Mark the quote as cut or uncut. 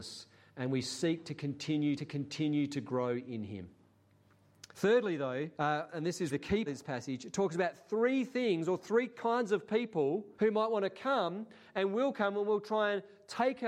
cut